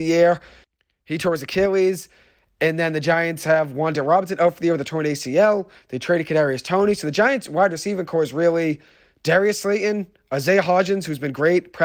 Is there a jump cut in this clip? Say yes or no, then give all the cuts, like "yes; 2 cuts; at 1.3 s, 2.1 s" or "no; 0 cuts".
no; 0 cuts